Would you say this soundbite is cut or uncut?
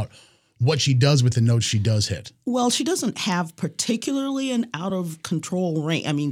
uncut